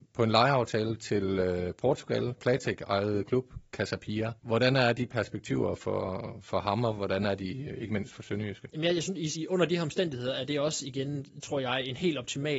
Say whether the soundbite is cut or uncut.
cut